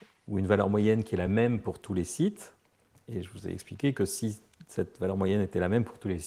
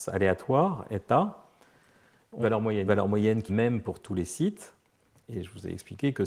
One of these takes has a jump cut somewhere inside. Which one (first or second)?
second